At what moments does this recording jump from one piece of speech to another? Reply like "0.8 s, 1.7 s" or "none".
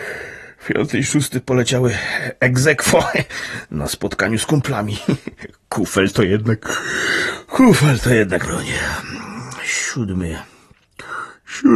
8.4 s